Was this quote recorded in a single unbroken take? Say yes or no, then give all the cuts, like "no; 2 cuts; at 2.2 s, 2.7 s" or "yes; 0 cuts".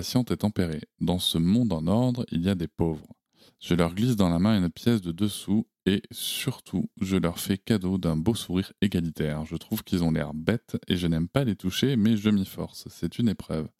no; 1 cut; at 3.5 s